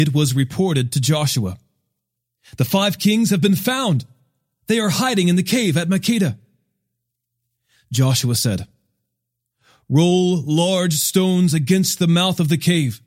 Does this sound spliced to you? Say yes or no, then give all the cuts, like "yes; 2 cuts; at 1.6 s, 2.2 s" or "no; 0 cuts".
no; 0 cuts